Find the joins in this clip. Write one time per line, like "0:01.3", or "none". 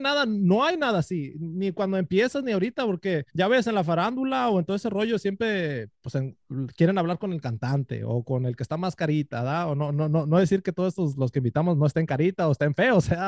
0:03.3
0:05.9